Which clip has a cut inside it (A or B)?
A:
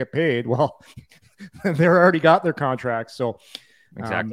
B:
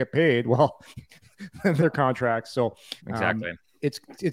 B